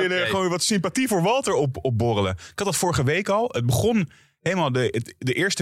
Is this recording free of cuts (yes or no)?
yes